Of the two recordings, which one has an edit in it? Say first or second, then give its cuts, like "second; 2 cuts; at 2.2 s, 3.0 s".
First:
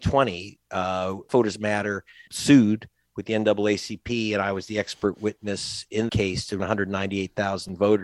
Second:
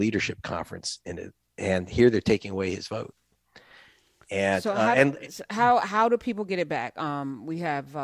first; 4 cuts; at 1.3 s, 2.3 s, 6.1 s, 6.6 s